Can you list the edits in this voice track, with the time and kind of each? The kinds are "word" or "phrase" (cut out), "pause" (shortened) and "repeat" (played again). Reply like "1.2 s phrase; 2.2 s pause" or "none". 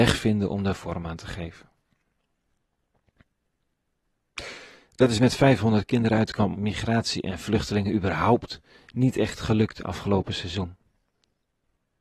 6.5 s phrase